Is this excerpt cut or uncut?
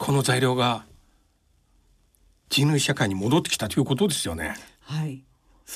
uncut